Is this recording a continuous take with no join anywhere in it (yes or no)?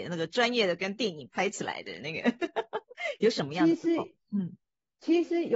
yes